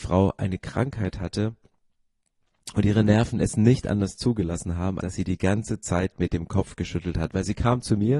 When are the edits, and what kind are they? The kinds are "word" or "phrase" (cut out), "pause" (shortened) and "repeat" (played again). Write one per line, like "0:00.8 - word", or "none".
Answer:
0:05.0 - word